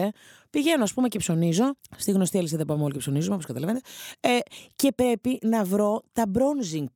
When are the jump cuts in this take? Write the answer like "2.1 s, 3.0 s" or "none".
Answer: 1.8 s